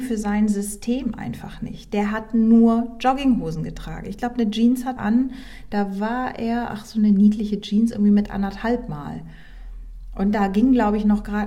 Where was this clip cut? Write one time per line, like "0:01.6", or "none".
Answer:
0:05.0